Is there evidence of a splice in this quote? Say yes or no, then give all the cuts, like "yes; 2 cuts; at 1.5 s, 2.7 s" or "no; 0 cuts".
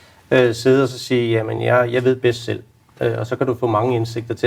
no; 0 cuts